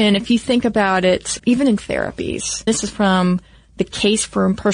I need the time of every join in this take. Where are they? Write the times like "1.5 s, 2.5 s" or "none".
1.4 s, 1.8 s, 2.7 s